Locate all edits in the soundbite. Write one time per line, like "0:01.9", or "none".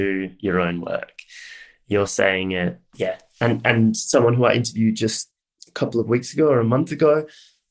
none